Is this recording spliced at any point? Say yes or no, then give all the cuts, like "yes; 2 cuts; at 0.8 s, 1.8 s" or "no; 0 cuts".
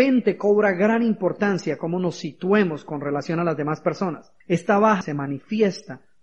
yes; 2 cuts; at 4.4 s, 5.0 s